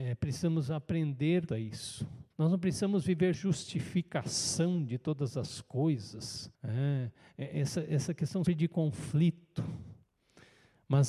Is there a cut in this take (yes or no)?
yes